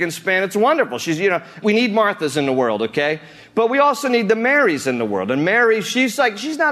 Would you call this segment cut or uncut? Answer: uncut